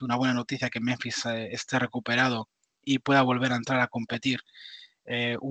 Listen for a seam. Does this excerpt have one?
no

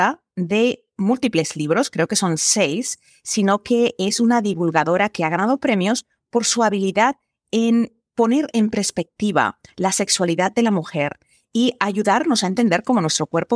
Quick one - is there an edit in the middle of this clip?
no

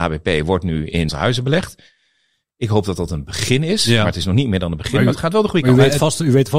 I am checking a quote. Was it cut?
yes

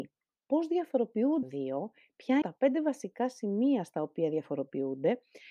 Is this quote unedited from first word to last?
no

